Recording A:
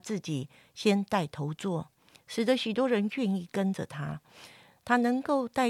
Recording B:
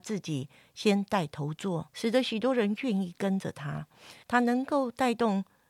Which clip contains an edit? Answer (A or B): B